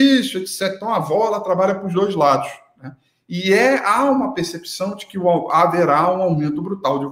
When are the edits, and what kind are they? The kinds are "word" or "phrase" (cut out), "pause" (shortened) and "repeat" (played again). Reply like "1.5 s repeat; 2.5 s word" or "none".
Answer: none